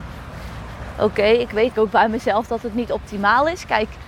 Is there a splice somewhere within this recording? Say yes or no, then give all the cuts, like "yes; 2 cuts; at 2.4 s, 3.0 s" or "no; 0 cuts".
yes; 1 cut; at 1.7 s